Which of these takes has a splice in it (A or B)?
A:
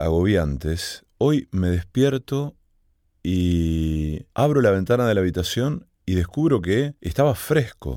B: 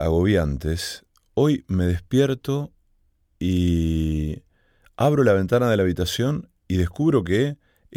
A